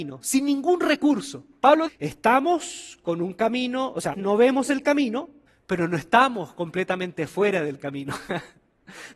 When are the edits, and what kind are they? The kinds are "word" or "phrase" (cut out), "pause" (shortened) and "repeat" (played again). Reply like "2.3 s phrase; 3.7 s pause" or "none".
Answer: 1.9 s word; 4.1 s phrase; 5.5 s pause